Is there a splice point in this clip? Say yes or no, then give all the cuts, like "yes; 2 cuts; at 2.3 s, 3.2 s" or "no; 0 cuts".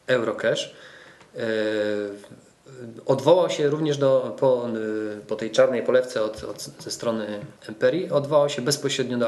yes; 1 cut; at 7.6 s